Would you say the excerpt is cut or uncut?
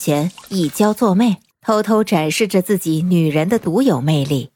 cut